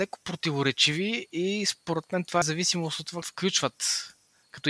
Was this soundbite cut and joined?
yes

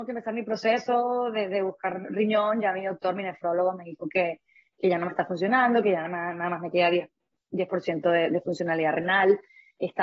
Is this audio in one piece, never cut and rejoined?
yes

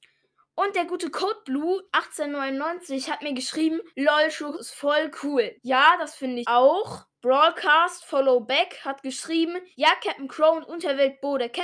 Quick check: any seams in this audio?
yes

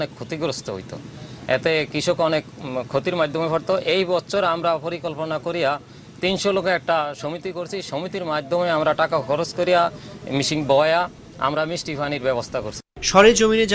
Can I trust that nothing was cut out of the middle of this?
yes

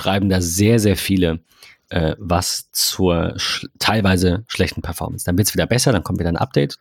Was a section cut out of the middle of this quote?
no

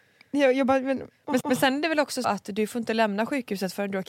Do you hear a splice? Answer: yes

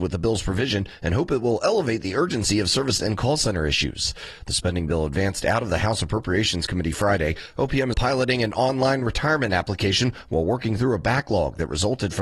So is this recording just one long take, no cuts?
no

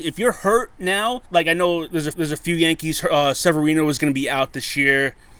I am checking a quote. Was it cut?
yes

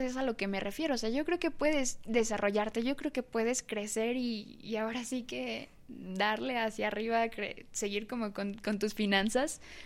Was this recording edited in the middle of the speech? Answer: no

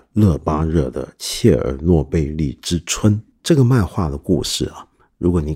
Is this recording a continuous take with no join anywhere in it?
no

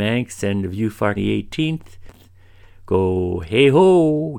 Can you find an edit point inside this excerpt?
yes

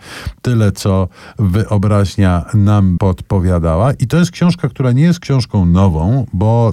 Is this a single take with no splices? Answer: no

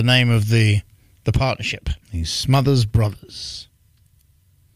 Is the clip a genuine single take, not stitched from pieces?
no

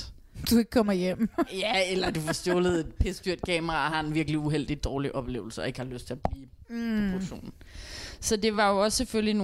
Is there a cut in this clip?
no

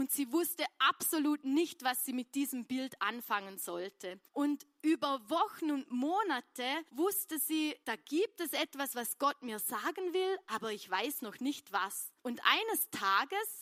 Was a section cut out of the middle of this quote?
yes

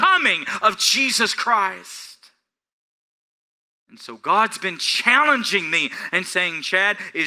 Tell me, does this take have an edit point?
no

